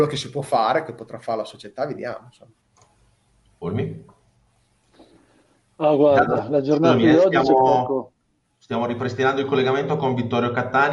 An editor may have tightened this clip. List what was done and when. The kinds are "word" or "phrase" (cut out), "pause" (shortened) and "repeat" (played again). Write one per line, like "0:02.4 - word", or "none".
none